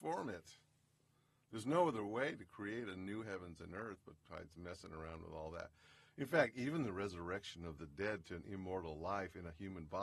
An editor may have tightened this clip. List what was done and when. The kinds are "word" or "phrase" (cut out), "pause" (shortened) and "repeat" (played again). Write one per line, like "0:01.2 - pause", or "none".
none

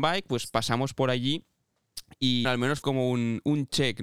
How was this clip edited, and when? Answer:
0:02.4 - word
0:02.8 - word

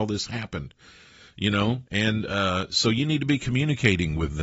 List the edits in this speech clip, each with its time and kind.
0:01.9 - pause

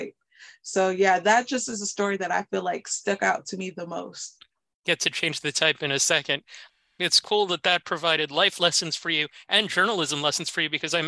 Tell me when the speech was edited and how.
none

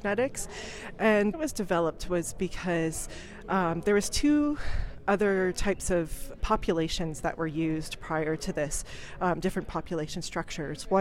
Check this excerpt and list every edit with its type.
0:01.3 - phrase
0:06.4 - word

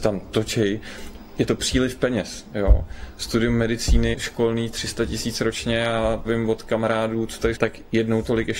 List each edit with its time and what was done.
0:04.1 - word
0:06.2 - word
0:07.5 - word

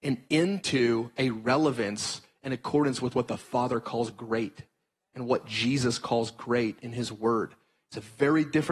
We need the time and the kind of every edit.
none

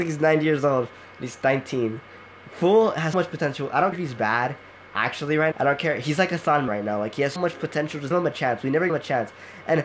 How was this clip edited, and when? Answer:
0:03.1 - word
0:03.9 - word
0:05.5 - word
0:06.7 - word
0:07.4 - word
0:08.1 - word
0:08.9 - word

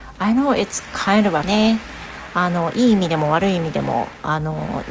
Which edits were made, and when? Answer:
0:01.4 - word

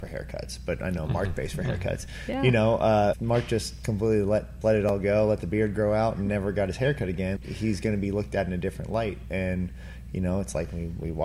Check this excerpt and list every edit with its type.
0:03.1 - word
0:04.6 - word
0:07.4 - word

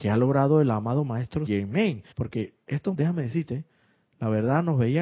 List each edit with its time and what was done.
0:01.5 - word
0:02.1 - pause
0:02.9 - word

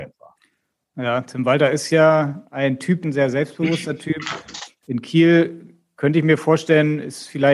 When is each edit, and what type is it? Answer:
0:03.0 - phrase

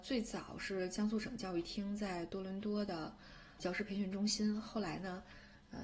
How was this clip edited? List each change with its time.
0:03.6 - word

